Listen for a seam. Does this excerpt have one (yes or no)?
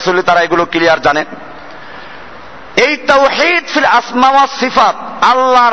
no